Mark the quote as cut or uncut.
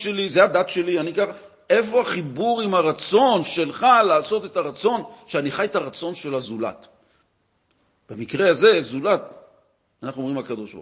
uncut